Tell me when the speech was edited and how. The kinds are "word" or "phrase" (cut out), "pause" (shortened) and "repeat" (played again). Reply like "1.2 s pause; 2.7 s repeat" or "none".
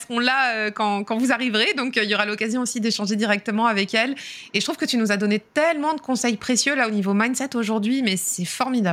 none